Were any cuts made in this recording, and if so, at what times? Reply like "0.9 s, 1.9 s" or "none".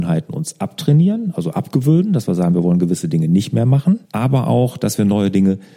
4.0 s